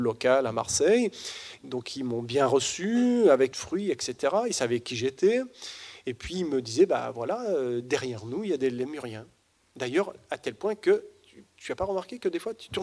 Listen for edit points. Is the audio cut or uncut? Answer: cut